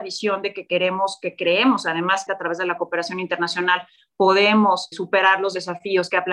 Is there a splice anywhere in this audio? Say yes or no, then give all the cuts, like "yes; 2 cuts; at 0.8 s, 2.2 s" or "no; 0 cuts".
yes; 1 cut; at 2.3 s